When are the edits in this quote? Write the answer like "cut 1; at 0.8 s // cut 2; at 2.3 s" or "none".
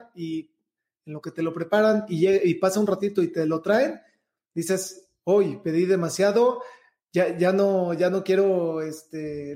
none